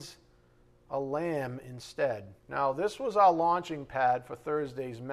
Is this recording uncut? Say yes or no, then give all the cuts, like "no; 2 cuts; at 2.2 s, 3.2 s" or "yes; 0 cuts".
no; 1 cut; at 2.4 s